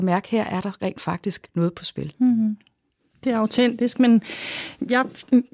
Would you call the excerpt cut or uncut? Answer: uncut